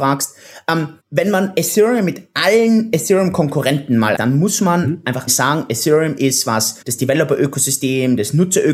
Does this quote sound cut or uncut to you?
cut